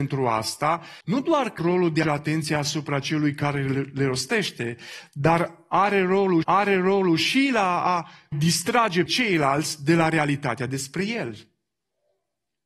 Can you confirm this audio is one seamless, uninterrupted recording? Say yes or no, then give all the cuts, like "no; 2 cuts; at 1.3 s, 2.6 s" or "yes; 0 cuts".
no; 6 cuts; at 1.0 s, 1.6 s, 2.0 s, 6.4 s, 8.3 s, 9.1 s